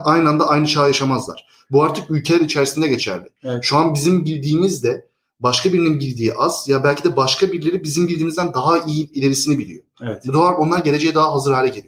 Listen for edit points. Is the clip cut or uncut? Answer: uncut